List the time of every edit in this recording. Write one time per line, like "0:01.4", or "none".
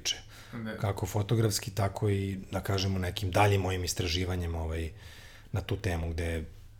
none